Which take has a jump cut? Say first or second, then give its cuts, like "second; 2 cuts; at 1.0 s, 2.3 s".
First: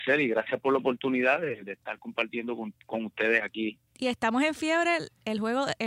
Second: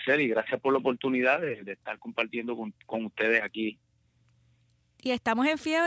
first; 1 cut; at 3.9 s